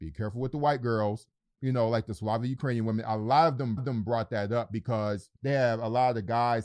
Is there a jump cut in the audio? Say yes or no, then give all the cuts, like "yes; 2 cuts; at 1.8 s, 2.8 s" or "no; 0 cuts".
yes; 2 cuts; at 3.8 s, 5.4 s